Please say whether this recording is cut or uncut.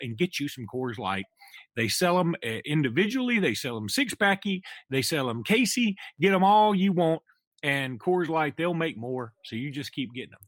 uncut